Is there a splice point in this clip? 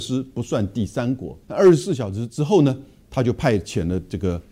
yes; 1 cut; at 1.4 s

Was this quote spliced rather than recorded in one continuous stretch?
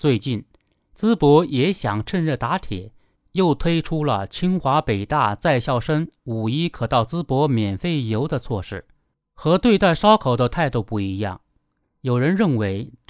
yes; 1 cut; at 9.1 s

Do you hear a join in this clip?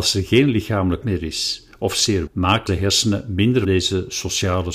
yes; 4 cuts; at 1.0 s, 2.3 s, 2.7 s, 3.6 s

